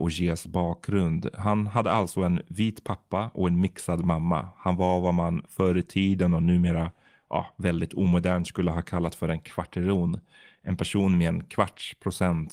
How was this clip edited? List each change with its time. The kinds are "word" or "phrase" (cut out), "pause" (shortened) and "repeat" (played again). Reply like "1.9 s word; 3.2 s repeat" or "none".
none

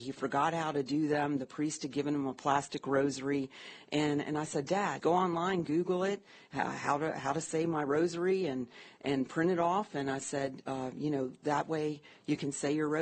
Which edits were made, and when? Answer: 5.0 s phrase

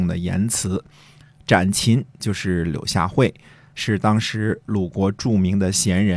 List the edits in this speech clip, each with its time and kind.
none

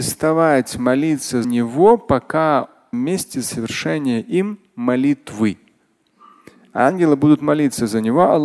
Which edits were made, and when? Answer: 1.4 s word; 2.9 s phrase

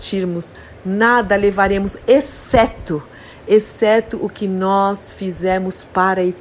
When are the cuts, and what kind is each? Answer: none

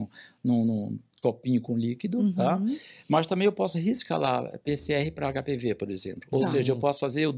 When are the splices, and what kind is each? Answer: none

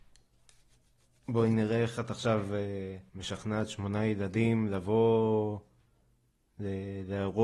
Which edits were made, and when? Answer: 3.1 s pause

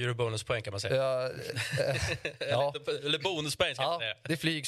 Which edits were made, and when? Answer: none

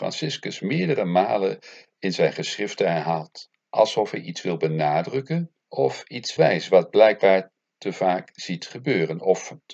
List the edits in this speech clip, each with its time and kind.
3.6 s pause; 5.6 s pause; 6.4 s word

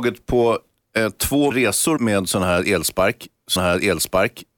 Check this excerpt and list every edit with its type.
1.5 s word; 2.0 s word; 3.6 s repeat

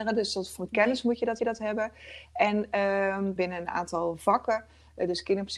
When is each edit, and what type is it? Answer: 1.4 s repeat; 3.4 s phrase

